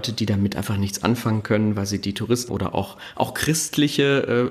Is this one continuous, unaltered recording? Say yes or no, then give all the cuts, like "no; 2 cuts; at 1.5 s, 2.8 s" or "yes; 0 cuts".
no; 1 cut; at 2.5 s